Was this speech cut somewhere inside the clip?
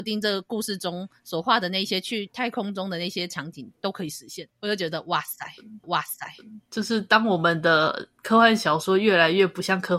yes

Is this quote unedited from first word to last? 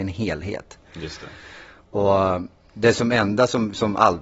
yes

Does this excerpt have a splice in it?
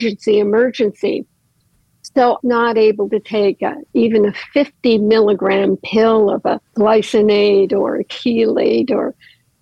yes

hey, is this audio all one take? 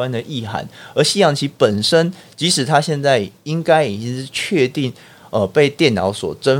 yes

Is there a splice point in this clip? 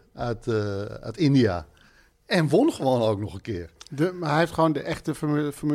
no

